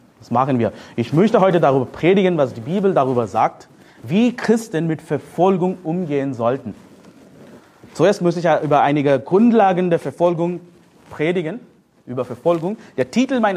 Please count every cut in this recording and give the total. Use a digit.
0